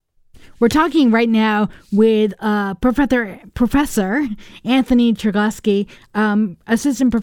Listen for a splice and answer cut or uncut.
uncut